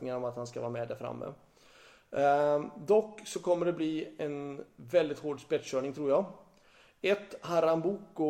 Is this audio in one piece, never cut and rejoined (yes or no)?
yes